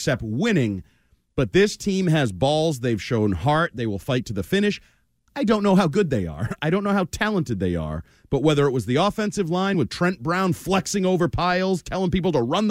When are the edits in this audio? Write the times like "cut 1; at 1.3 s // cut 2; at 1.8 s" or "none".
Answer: none